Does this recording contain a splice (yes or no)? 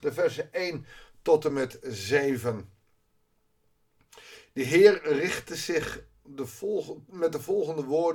no